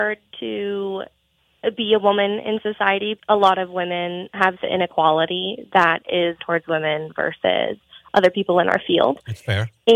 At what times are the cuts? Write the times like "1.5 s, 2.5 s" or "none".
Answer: 3.2 s, 4.6 s, 6.4 s